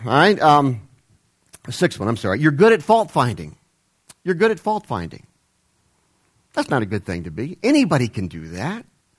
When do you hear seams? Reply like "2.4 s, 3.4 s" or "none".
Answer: none